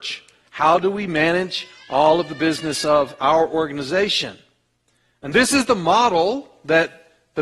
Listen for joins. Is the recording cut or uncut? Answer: uncut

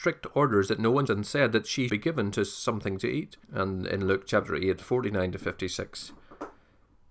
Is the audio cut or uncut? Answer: cut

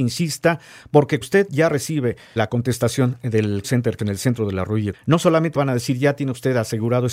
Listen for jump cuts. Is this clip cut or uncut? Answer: cut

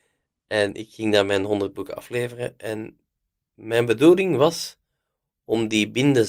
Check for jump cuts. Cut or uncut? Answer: uncut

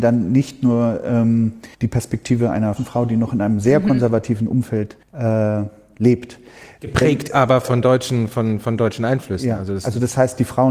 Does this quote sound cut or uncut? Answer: cut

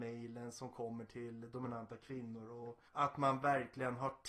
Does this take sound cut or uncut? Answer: cut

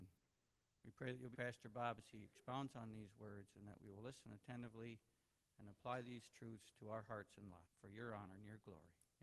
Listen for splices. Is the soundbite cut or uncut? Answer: cut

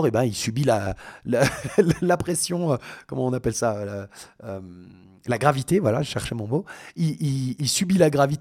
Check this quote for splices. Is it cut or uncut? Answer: uncut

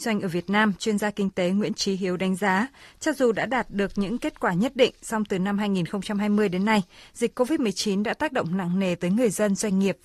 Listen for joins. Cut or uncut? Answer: uncut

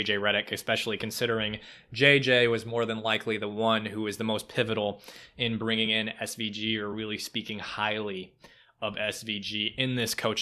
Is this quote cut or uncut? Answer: uncut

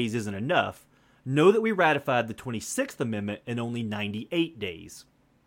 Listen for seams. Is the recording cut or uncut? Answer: uncut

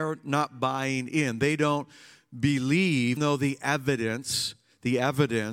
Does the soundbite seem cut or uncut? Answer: cut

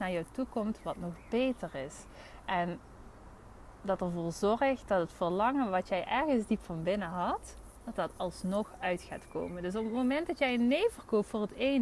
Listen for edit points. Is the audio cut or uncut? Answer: uncut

